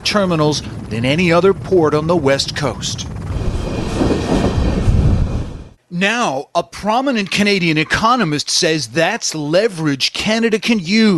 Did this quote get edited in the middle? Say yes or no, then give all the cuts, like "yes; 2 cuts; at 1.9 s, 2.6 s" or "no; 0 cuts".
no; 0 cuts